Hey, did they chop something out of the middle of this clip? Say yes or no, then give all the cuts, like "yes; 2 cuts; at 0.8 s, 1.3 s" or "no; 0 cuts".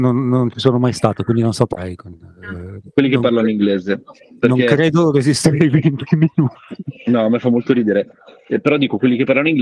no; 0 cuts